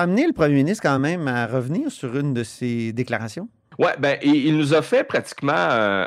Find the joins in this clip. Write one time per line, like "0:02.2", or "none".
none